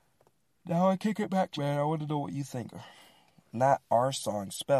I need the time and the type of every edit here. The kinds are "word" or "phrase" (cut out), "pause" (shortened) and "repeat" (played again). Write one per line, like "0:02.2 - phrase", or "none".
0:01.6 - word